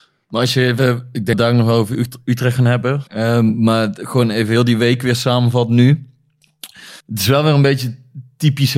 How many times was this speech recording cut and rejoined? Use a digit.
3